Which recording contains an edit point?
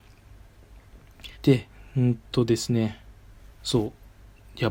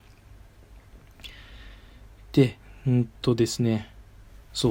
first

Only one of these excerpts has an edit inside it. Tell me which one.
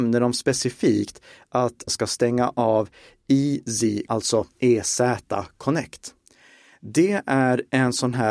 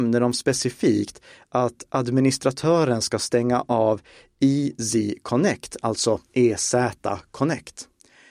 first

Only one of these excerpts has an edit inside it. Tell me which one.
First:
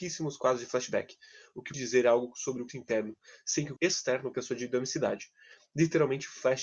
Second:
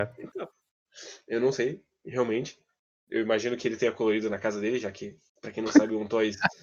first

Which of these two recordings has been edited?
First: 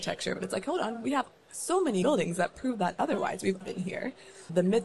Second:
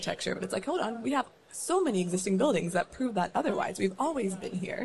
first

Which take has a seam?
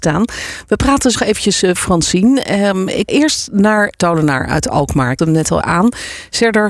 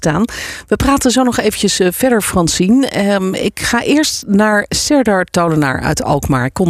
first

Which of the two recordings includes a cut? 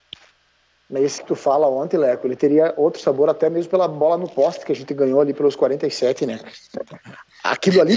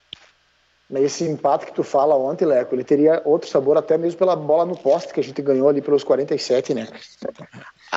first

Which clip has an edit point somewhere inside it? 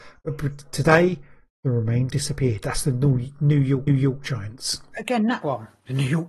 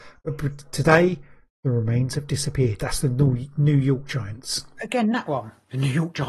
first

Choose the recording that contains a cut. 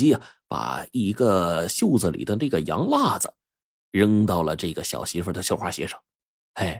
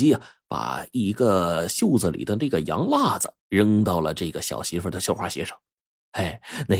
second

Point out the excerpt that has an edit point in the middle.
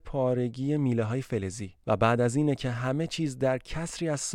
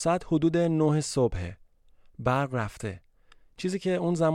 first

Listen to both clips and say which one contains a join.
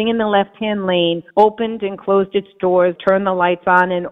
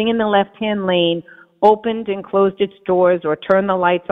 first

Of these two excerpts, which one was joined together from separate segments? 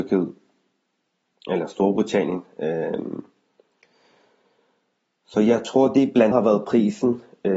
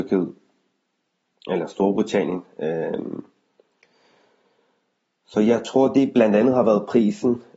first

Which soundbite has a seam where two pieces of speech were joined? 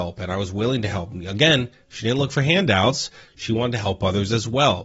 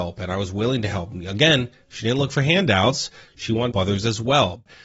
second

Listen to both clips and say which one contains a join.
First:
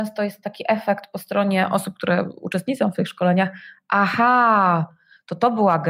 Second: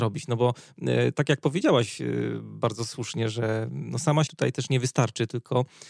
second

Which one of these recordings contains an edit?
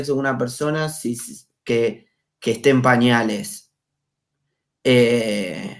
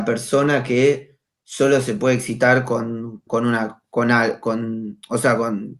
second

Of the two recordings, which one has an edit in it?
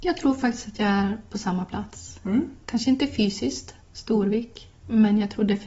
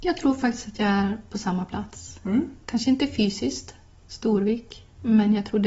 first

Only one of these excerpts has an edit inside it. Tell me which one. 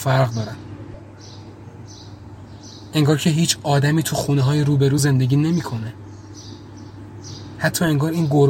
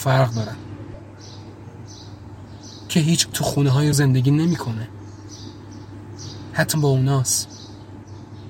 second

